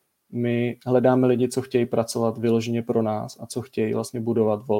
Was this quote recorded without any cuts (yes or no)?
yes